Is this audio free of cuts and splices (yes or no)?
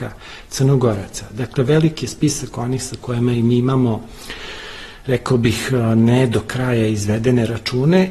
yes